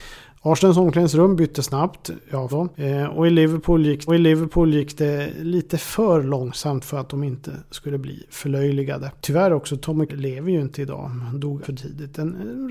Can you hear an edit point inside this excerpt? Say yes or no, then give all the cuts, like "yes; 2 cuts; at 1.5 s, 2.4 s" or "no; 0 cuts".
yes; 4 cuts; at 2.5 s, 4.1 s, 10.1 s, 11.6 s